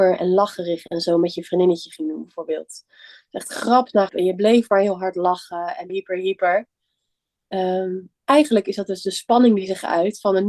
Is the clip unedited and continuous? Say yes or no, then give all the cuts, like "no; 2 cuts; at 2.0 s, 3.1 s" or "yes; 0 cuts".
no; 3 cuts; at 4.1 s, 5.9 s, 8.2 s